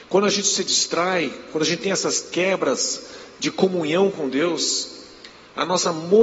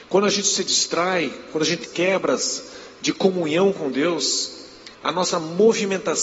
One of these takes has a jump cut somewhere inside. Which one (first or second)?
second